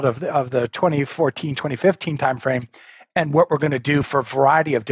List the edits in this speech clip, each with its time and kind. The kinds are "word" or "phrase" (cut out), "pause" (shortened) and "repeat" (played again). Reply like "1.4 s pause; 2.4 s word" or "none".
none